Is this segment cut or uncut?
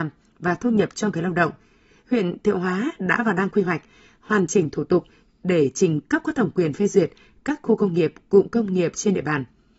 uncut